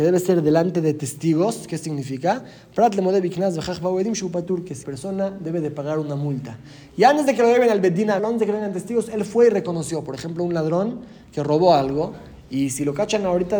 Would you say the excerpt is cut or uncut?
cut